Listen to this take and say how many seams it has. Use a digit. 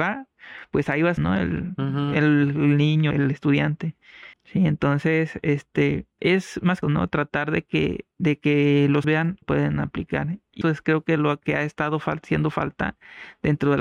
9